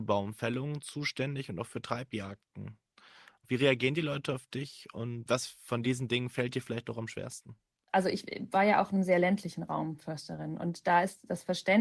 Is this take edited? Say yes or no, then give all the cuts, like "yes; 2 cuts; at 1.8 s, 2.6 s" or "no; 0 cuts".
no; 0 cuts